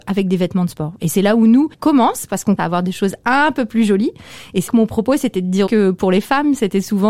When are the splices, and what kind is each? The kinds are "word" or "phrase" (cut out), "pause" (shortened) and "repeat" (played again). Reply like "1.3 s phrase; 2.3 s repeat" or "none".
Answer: 1.7 s word; 2.6 s word; 4.7 s word; 5.7 s word